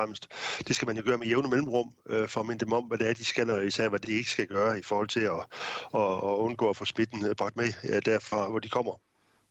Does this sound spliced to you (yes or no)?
yes